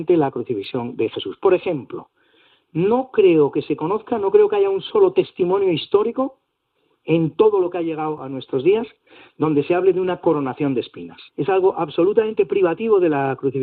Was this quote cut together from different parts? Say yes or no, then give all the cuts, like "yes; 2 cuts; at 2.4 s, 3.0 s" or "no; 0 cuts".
yes; 1 cut; at 11.3 s